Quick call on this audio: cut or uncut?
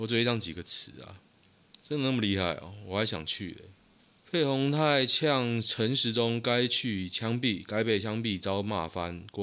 uncut